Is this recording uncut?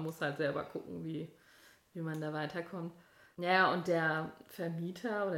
yes; 0 cuts

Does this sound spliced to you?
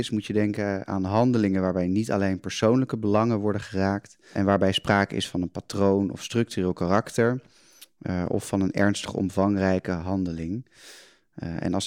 no; 0 cuts

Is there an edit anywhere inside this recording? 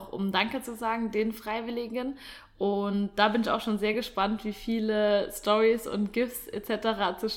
no; 0 cuts

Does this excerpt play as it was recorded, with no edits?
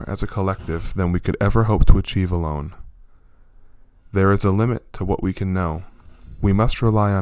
yes; 0 cuts

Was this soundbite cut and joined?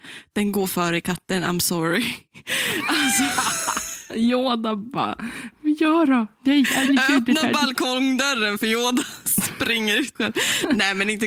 yes; 1 cut; at 10.1 s

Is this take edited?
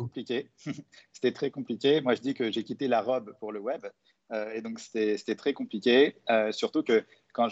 no; 0 cuts

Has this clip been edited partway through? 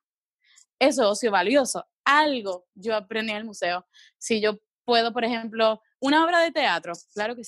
no; 0 cuts

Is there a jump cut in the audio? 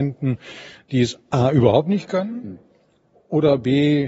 no; 0 cuts

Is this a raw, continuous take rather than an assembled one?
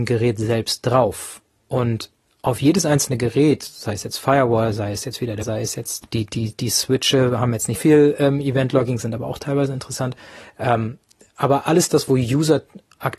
no; 3 cuts; at 5.4 s, 6.0 s, 7.7 s

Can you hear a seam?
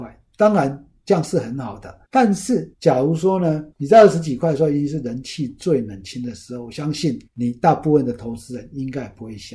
yes; 4 cuts; at 2.0 s, 2.7 s, 3.7 s, 7.3 s

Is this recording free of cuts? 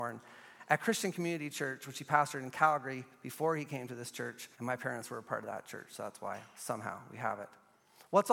no; 1 cut; at 4.5 s

